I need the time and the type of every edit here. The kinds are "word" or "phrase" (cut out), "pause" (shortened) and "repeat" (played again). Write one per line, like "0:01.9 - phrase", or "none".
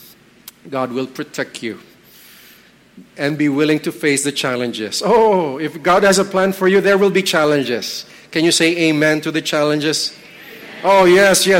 none